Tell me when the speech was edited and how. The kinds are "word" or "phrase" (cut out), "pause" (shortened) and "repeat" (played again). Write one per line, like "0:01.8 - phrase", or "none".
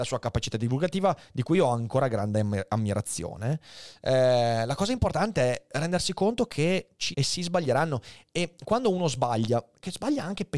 0:07.1 - word